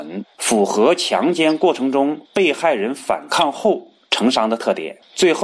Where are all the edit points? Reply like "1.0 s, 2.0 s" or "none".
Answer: 2.2 s